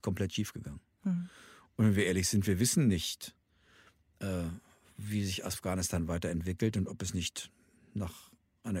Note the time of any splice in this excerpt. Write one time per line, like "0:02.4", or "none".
none